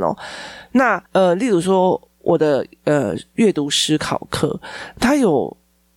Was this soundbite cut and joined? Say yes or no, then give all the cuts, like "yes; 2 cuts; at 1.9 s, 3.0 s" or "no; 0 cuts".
yes; 1 cut; at 1.1 s